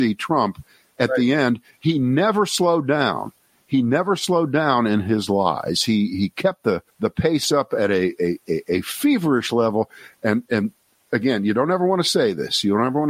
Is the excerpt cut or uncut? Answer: cut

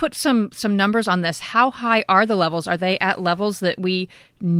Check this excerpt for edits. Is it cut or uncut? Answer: uncut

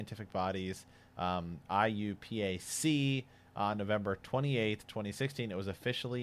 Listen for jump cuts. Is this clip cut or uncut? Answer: uncut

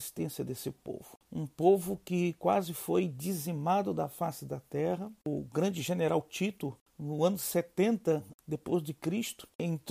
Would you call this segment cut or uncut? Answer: uncut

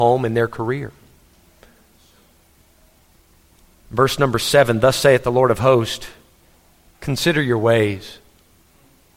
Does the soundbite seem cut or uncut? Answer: uncut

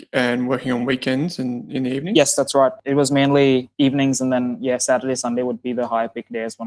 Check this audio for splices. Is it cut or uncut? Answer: uncut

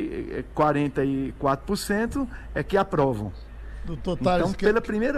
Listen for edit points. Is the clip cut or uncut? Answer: uncut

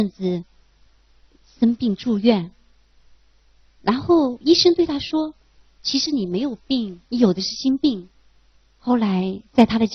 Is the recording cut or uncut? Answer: cut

